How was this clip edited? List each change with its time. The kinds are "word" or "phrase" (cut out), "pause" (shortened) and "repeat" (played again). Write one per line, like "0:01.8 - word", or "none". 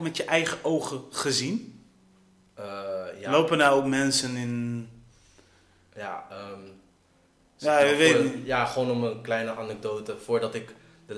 none

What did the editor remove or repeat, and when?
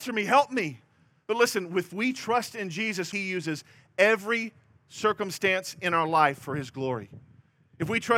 0:03.1 - phrase

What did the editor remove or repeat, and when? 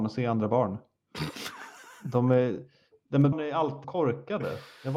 0:03.3 - word
0:03.8 - word

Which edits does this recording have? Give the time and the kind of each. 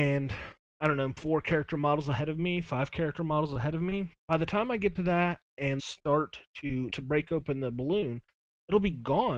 0:04.2 - pause
0:05.8 - word
0:06.9 - phrase

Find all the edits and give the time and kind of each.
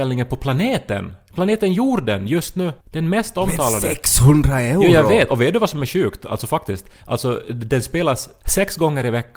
0:02.8 - pause

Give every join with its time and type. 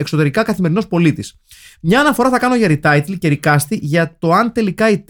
none

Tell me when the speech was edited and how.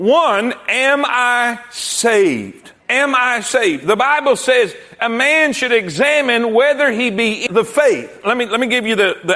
0:02.8 - pause
0:07.5 - word

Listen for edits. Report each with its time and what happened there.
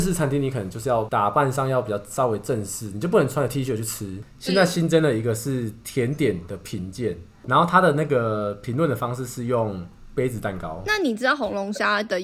none

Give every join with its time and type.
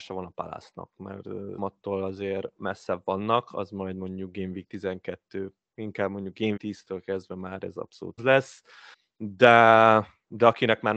0:01.6 - word
0:06.6 - word
0:08.2 - word
0:08.9 - pause

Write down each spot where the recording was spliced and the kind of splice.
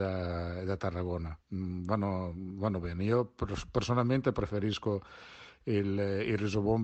0:01.4 - pause

